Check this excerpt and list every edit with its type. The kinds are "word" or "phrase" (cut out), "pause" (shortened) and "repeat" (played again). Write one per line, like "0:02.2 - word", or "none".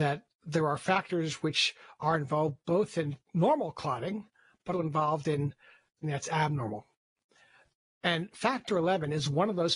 0:04.7 - word
0:06.0 - word